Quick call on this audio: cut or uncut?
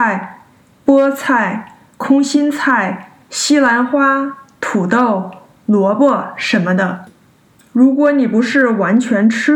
uncut